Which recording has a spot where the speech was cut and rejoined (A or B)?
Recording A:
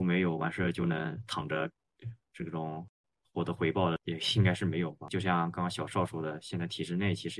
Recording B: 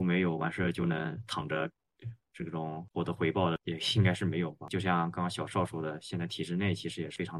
B